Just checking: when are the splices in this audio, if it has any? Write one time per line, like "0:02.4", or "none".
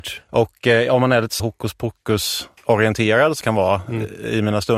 0:01.4
0:02.6
0:03.4